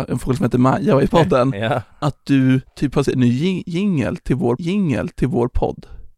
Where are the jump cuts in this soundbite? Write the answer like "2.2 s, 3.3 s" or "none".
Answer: 1.1 s, 2.7 s, 3.1 s, 4.6 s